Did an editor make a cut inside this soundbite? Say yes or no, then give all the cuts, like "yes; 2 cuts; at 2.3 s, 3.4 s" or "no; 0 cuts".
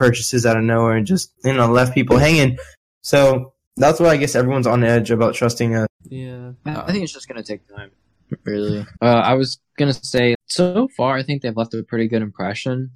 yes; 3 cuts; at 1.3 s, 5.9 s, 10.3 s